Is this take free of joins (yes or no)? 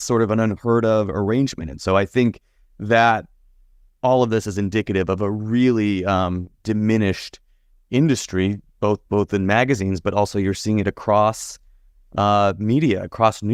yes